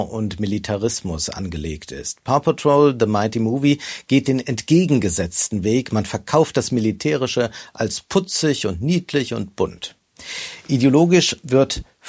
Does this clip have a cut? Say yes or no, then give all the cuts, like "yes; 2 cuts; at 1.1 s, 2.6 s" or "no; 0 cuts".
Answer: no; 0 cuts